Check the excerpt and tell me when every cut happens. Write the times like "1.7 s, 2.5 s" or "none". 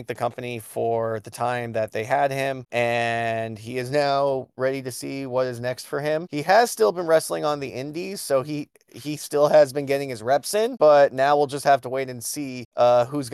none